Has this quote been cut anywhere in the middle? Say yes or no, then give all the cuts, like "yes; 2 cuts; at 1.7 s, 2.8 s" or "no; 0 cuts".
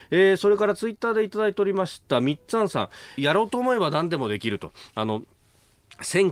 yes; 1 cut; at 3.2 s